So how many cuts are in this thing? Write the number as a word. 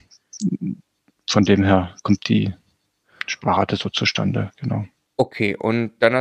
zero